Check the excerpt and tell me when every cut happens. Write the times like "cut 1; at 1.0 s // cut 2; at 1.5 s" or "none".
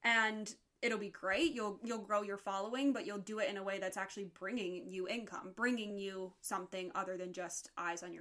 none